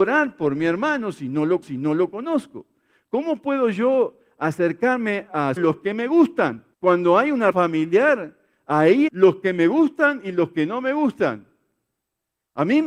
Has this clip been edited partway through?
yes; 5 cuts; at 1.6 s, 5.6 s, 6.7 s, 7.5 s, 9.1 s

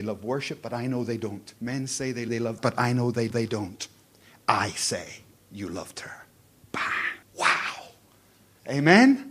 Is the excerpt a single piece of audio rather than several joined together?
no; 6 cuts; at 1.6 s, 2.3 s, 2.6 s, 3.3 s, 5.4 s, 7.2 s

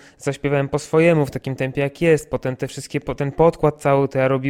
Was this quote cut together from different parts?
no; 0 cuts

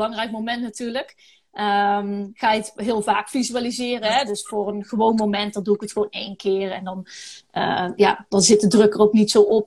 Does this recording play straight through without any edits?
yes; 0 cuts

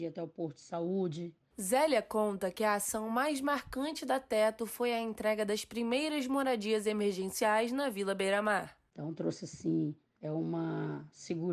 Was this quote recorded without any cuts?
yes; 0 cuts

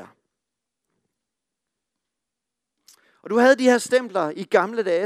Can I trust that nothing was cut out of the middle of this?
yes; 0 cuts

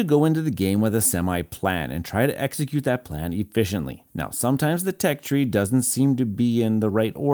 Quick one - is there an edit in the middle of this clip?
yes; 1 cut; at 4.1 s

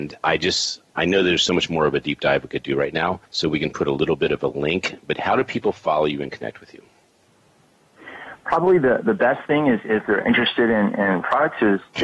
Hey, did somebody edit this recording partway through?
yes; 1 cut; at 3.3 s

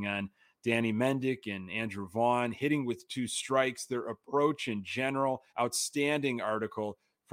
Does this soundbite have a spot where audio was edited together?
yes; 1 cut; at 5.5 s

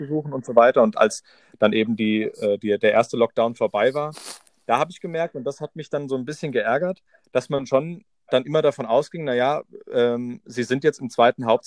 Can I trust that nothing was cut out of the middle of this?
yes; 0 cuts

